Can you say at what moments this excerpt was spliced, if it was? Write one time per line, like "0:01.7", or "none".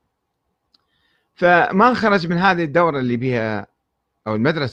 none